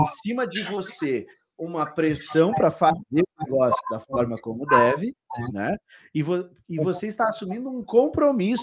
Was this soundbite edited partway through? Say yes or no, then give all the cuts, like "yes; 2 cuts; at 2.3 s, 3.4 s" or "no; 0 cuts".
no; 0 cuts